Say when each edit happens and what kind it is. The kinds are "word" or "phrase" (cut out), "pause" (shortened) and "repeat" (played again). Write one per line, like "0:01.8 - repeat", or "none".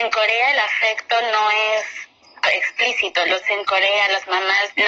0:02.5 - word
0:03.4 - word